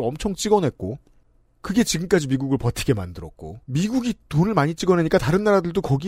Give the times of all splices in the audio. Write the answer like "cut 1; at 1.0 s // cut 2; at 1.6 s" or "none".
cut 1; at 3.6 s

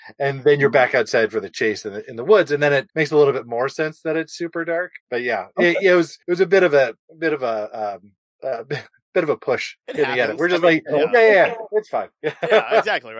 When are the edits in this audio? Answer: cut 1; at 2.9 s // cut 2; at 5.0 s // cut 3; at 6.2 s // cut 4; at 7.0 s // cut 5; at 8.2 s

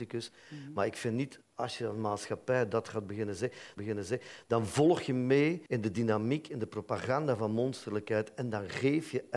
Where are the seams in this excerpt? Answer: cut 1; at 1.4 s // cut 2; at 3.8 s // cut 3; at 5.7 s

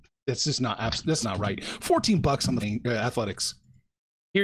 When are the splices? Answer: cut 1; at 1.2 s // cut 2; at 2.6 s

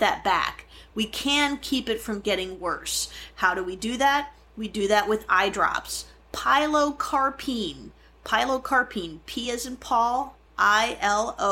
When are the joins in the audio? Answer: none

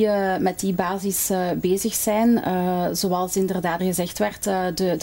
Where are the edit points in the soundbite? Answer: cut 1; at 3.8 s

